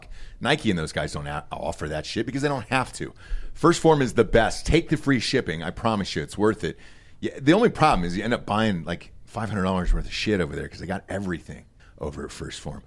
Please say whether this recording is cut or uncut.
uncut